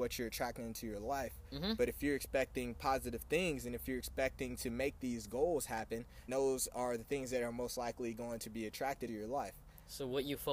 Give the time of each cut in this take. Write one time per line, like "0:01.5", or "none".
0:06.3
0:09.1